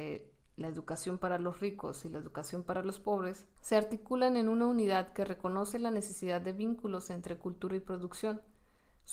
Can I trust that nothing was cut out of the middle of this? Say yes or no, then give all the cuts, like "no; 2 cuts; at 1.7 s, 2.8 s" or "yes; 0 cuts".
no; 1 cut; at 3.6 s